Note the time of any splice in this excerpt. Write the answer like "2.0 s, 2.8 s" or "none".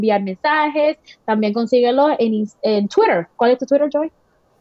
none